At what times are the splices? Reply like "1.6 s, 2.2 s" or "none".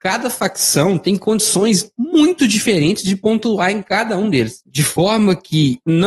none